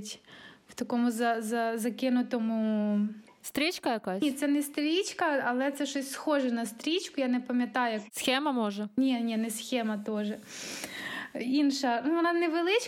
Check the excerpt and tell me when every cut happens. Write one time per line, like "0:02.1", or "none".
none